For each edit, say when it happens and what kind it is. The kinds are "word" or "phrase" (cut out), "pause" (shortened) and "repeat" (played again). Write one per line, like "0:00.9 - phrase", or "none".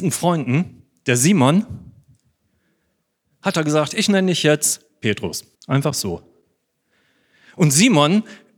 0:05.5 - pause